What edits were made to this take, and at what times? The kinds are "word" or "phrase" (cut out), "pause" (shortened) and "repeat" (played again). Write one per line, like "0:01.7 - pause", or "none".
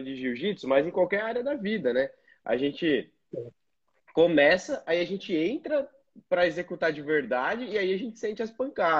none